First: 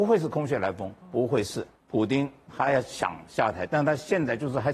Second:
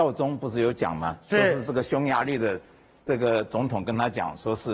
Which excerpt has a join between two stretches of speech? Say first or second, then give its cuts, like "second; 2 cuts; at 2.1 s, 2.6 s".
first; 2 cuts; at 1.0 s, 1.8 s